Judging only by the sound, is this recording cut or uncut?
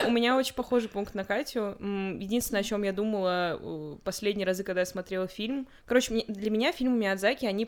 cut